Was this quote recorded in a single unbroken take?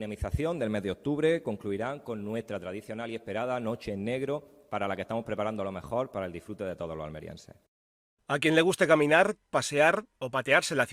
yes; 0 cuts

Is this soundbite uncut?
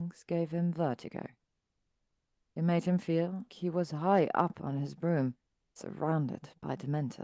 no; 1 cut; at 3.5 s

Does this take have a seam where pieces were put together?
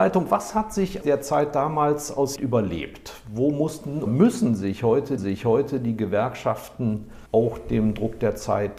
yes; 5 cuts; at 1.0 s, 2.4 s, 4.1 s, 5.2 s, 7.3 s

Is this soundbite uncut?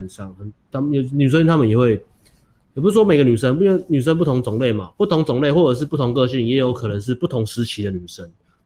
yes; 0 cuts

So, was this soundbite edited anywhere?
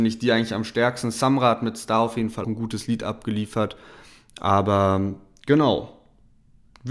yes; 1 cut; at 2.4 s

